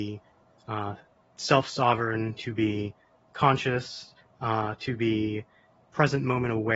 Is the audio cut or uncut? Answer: uncut